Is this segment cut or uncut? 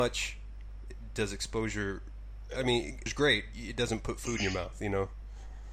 cut